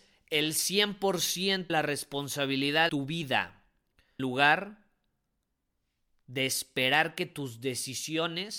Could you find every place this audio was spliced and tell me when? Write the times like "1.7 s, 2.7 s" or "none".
1.7 s, 2.9 s, 4.2 s